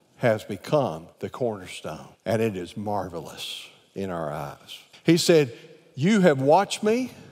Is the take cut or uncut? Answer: cut